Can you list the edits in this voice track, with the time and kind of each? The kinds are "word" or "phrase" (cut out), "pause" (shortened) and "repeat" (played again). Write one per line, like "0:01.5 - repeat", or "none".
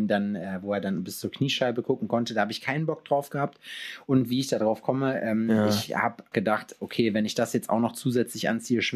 0:06.3 - word

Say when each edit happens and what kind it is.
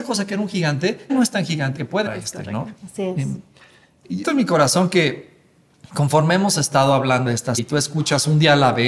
0:01.1 - word
0:01.8 - phrase
0:02.1 - word
0:02.8 - pause
0:04.2 - word
0:07.3 - word
0:07.6 - word

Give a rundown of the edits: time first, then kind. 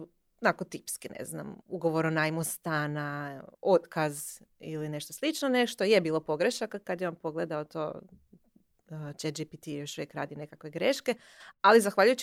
0:01.6 - pause
0:03.5 - pause

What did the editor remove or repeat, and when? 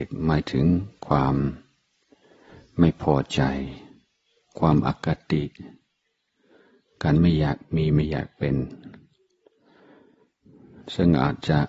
none

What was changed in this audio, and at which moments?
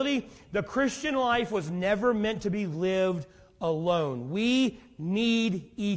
none

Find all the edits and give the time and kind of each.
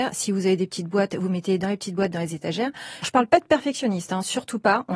0:03.0 - word

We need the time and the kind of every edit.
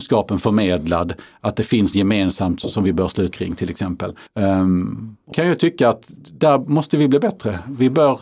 0:01.9 - word
0:03.3 - word
0:04.3 - pause
0:05.3 - word

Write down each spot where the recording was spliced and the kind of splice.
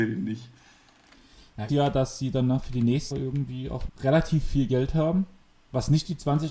0:01.7 - phrase
0:03.1 - word
0:03.9 - phrase

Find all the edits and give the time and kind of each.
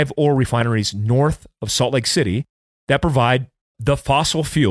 none

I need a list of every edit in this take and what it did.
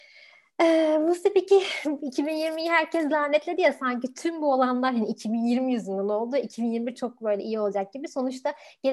none

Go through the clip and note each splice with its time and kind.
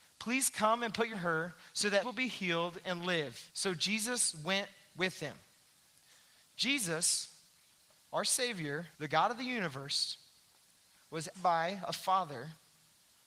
0:01.1 - phrase
0:02.0 - word
0:03.5 - pause
0:08.9 - pause
0:11.3 - word

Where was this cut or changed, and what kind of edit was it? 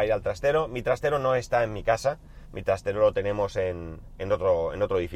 0:02.4 - pause

